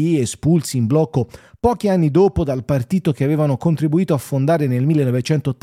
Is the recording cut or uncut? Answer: uncut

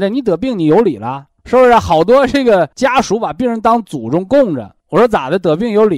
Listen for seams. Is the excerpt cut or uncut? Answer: cut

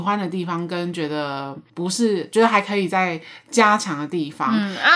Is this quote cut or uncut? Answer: cut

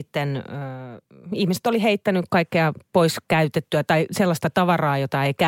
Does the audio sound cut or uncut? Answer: uncut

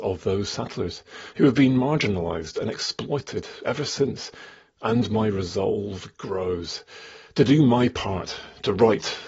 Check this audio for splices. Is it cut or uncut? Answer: uncut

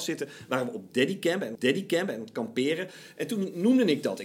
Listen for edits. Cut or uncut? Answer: cut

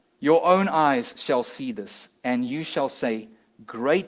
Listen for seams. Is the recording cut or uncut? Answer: uncut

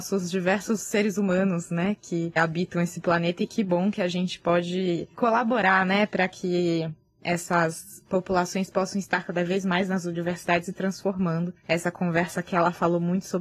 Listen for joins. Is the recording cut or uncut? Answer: uncut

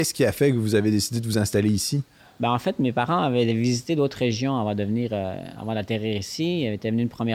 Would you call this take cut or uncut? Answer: uncut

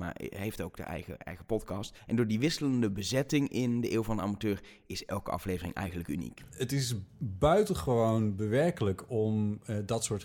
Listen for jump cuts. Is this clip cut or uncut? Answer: cut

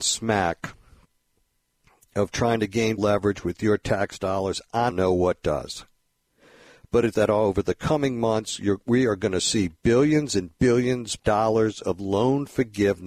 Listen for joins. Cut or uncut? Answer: cut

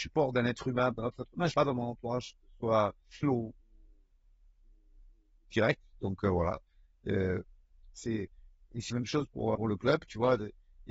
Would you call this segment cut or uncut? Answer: cut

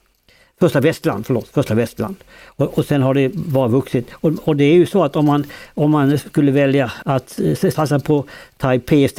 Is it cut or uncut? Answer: cut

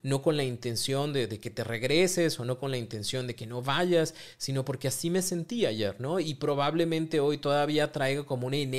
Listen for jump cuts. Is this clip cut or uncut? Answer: uncut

